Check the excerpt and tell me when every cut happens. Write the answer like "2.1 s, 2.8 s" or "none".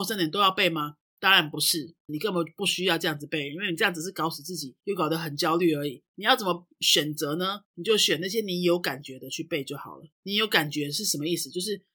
2.1 s, 4.8 s, 7.6 s, 10.1 s